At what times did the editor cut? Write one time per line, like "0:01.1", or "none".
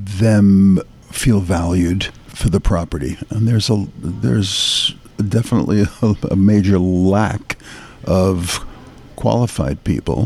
none